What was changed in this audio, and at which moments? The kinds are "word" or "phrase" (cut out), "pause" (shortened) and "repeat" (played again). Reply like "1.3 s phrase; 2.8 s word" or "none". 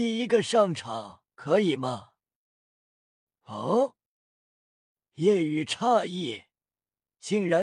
1.3 s pause